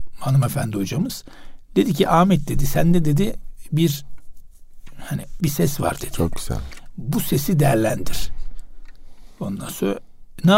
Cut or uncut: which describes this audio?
cut